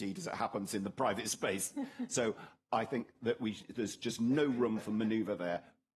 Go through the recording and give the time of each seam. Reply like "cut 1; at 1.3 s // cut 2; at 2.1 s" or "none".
none